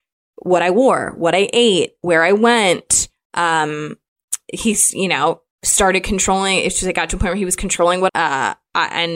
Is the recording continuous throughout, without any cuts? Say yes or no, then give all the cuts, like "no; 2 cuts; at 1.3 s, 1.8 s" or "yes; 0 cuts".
no; 1 cut; at 8.1 s